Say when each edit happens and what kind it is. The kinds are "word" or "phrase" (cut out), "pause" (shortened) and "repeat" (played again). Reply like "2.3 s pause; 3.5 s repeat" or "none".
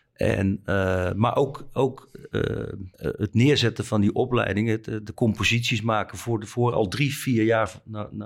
2.9 s pause

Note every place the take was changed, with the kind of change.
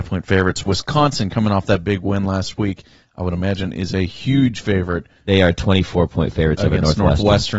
none

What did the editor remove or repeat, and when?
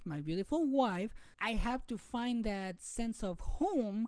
1.3 s word

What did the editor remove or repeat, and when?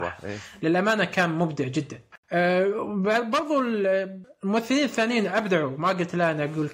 none

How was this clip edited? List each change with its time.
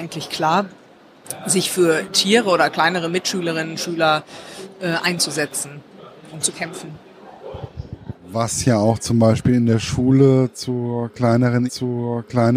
11.7 s repeat

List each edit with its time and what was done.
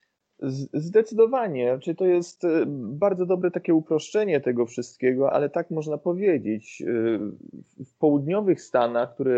5.3 s word

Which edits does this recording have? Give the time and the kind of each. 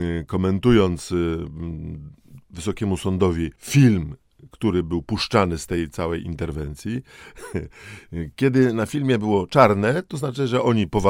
3.6 s pause

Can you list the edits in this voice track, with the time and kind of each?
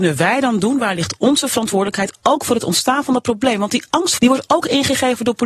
4.2 s phrase

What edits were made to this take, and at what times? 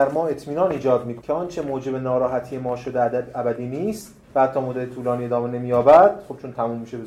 1.2 s word; 4.2 s pause

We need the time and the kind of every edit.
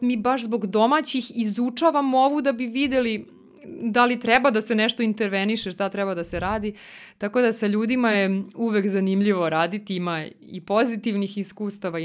none

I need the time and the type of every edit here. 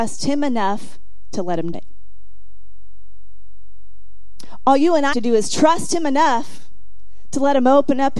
1.7 s word; 5.1 s word

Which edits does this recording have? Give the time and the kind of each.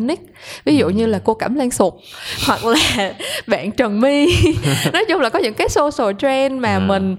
none

